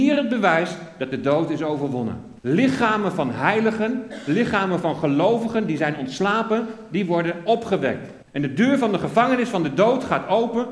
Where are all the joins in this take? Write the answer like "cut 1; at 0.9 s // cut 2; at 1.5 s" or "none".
cut 1; at 2.4 s // cut 2; at 8.2 s